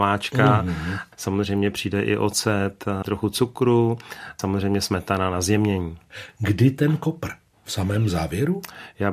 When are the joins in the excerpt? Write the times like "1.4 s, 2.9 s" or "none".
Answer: 3.1 s